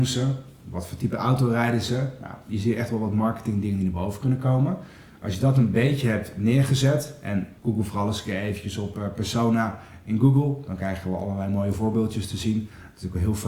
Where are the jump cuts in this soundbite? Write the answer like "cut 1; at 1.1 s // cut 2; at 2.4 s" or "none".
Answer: cut 1; at 7.6 s